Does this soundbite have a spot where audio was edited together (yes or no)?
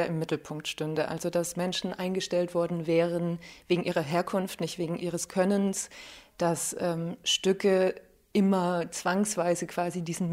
no